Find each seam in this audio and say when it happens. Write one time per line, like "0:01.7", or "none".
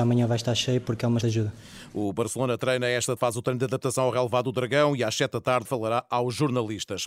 0:01.2
0:03.2
0:05.6